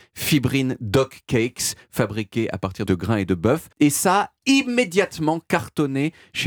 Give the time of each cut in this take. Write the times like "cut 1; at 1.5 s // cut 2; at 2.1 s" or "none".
cut 1; at 2.9 s // cut 2; at 3.7 s